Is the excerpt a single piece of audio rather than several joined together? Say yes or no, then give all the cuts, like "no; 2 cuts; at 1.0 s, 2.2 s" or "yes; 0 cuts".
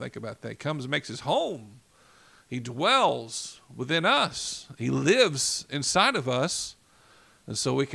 yes; 0 cuts